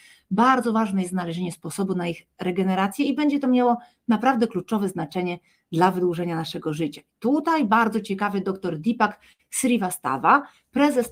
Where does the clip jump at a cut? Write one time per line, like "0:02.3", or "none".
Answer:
none